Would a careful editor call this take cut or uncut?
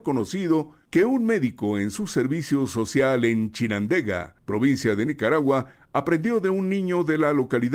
uncut